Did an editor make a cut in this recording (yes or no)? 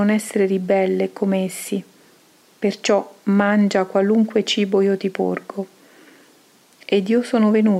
no